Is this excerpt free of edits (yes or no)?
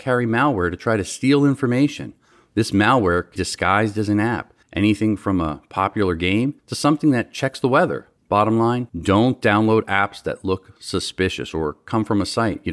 no